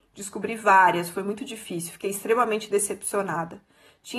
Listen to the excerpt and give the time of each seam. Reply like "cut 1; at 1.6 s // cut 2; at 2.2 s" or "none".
none